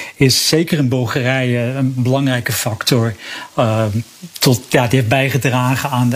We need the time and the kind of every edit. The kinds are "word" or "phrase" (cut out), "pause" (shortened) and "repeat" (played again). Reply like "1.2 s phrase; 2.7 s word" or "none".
none